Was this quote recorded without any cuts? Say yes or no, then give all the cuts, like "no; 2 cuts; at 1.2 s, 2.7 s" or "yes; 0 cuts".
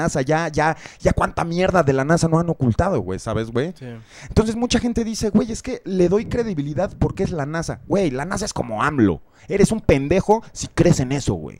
no; 1 cut; at 5.8 s